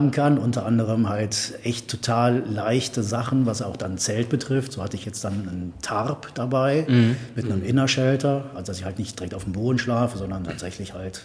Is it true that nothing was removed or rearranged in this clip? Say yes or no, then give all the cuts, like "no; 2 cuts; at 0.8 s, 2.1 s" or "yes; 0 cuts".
yes; 0 cuts